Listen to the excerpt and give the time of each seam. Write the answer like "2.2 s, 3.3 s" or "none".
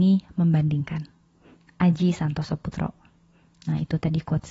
none